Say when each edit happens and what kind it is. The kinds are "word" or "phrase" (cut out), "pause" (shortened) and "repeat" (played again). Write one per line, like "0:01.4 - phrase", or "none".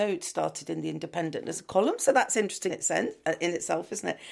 0:02.7 - word